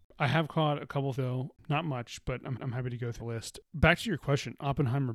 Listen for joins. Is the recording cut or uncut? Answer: cut